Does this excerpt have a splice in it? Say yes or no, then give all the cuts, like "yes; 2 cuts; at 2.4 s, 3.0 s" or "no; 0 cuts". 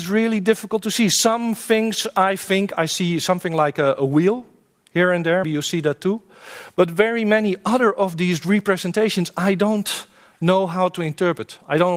yes; 1 cut; at 5.4 s